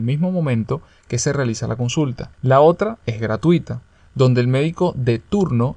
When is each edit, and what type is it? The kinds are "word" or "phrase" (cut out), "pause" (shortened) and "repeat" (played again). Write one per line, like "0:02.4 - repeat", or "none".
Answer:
0:02.3 - pause